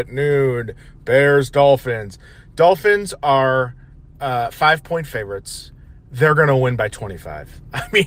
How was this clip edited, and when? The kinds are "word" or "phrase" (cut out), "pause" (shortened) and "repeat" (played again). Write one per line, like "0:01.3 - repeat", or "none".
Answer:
none